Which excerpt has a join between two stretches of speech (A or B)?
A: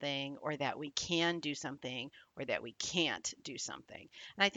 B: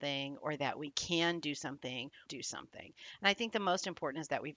B